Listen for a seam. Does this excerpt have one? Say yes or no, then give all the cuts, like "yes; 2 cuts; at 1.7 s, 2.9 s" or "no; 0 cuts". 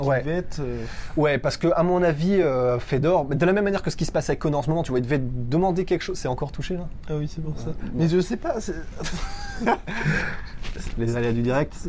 no; 0 cuts